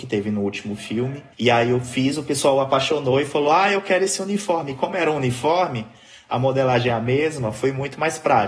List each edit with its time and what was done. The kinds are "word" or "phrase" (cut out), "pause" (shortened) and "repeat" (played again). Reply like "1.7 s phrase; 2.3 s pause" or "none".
1.3 s pause